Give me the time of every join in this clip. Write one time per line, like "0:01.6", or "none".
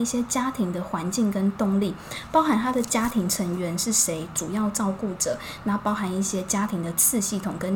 0:04.3